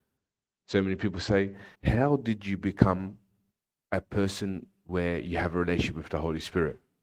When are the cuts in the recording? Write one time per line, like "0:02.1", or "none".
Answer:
0:01.8
0:03.5